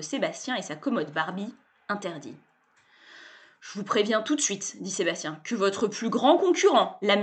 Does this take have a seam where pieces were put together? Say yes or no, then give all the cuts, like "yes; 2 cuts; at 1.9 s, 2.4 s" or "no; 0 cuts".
no; 0 cuts